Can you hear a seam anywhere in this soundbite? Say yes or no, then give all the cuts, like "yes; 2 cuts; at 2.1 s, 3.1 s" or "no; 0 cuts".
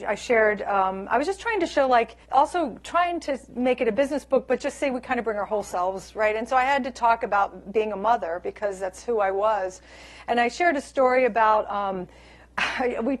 yes; 1 cut; at 2.2 s